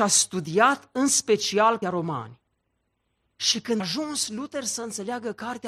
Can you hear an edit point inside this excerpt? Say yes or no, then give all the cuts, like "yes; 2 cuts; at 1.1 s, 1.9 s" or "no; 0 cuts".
yes; 2 cuts; at 1.8 s, 3.8 s